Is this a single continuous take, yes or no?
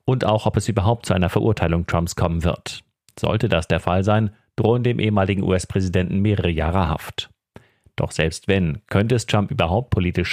yes